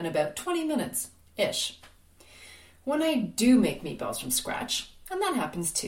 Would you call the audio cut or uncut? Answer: uncut